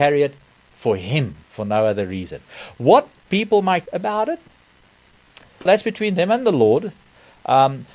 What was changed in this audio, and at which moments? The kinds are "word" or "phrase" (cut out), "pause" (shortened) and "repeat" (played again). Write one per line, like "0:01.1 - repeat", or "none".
0:01.4 - pause
0:03.9 - word
0:05.7 - word